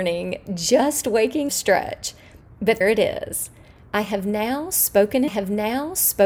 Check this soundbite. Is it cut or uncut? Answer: cut